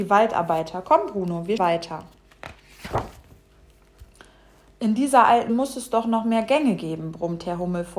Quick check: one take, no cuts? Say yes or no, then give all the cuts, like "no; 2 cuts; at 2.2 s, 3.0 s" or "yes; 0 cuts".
no; 2 cuts; at 1.6 s, 5.5 s